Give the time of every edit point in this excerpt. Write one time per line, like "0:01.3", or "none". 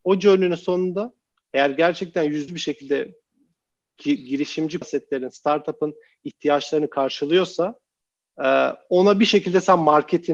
0:02.5
0:04.8